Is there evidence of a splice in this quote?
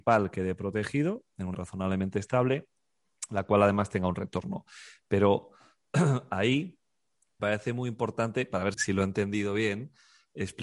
yes; 3 cuts; at 1.5 s, 7.4 s, 8.7 s

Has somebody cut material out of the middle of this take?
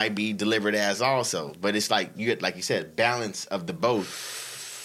no; 0 cuts

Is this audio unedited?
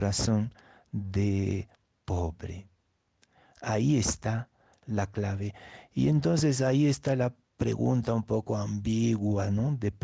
yes; 0 cuts

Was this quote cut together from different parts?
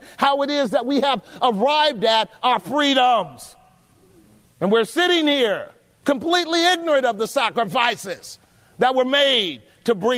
no; 0 cuts

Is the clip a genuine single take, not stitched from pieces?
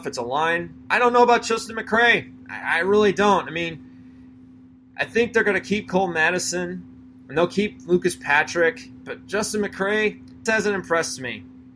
no; 1 cut; at 10.5 s

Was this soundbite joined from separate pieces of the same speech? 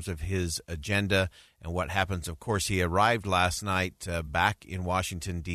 no; 0 cuts

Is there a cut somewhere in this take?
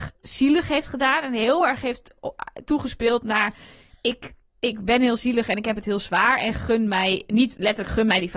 no; 0 cuts

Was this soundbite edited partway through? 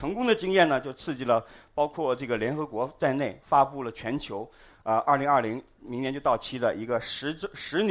no; 0 cuts

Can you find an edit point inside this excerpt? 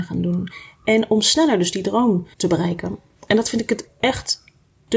yes; 1 cut; at 2.3 s

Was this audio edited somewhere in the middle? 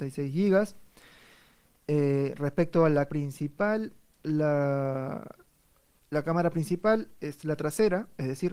yes; 1 cut; at 3.1 s

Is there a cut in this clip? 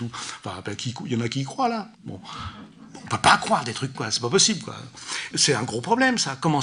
yes; 3 cuts; at 1.9 s, 3.9 s, 5.3 s

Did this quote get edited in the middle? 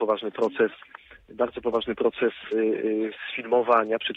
no; 0 cuts

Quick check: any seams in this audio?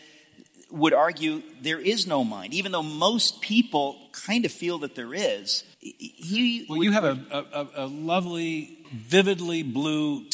yes; 3 cuts; at 4.1 s, 5.7 s, 8.8 s

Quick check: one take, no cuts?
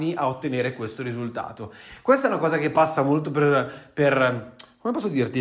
yes; 0 cuts

